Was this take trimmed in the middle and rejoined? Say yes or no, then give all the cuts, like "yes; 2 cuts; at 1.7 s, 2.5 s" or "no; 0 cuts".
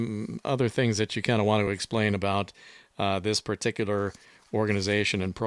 no; 0 cuts